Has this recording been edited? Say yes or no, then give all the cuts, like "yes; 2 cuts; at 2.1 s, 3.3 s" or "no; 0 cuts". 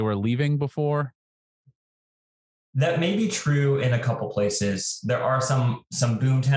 no; 0 cuts